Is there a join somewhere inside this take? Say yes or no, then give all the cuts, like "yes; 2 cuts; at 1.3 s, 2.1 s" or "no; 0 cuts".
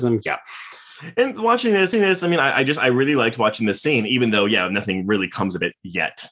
yes; 1 cut; at 1.9 s